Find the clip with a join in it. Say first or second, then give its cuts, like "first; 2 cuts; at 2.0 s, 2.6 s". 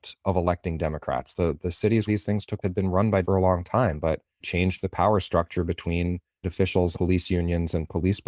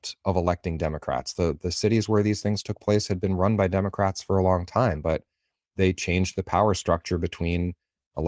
first; 6 cuts; at 2.1 s, 2.6 s, 3.2 s, 4.4 s, 6.4 s, 6.9 s